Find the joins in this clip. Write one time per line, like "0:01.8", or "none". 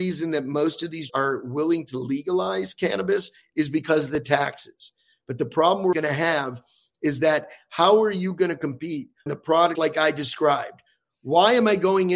0:01.1
0:05.9
0:09.3
0:09.8